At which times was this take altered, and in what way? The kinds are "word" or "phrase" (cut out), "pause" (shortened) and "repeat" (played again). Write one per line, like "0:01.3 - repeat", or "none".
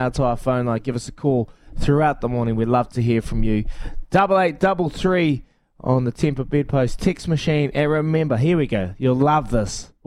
none